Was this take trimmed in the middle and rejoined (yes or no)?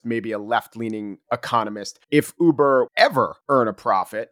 yes